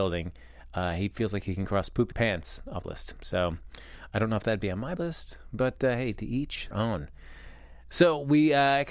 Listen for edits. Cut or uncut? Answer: cut